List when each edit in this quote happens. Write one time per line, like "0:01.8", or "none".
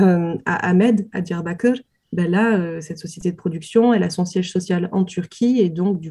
none